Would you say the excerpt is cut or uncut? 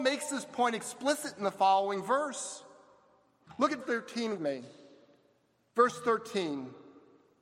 cut